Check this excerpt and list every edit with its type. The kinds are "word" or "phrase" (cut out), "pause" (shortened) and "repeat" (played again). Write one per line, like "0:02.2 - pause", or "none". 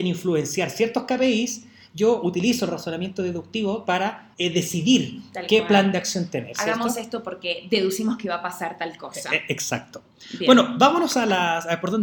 0:04.3 - pause